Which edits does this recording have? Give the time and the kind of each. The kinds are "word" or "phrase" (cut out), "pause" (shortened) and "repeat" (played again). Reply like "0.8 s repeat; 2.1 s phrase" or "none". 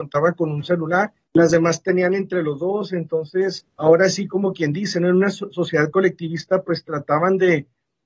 1.2 s pause; 3.7 s pause